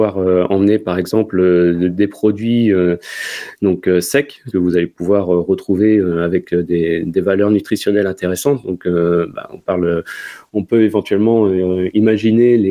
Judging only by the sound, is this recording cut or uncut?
uncut